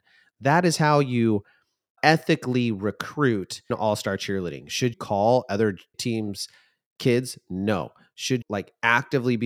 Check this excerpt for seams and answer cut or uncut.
cut